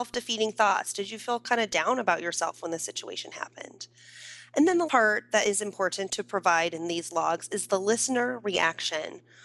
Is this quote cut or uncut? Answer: cut